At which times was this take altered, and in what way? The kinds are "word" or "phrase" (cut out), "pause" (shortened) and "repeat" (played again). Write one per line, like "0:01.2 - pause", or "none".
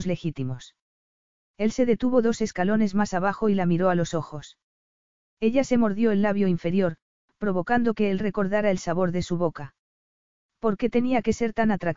none